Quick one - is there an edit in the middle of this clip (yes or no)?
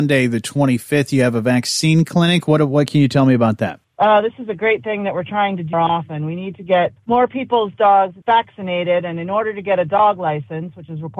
yes